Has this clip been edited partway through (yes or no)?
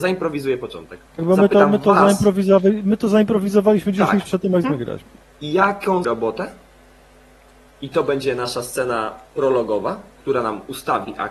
yes